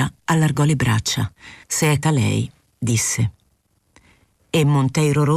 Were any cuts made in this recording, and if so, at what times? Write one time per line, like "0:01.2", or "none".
0:01.6
0:02.0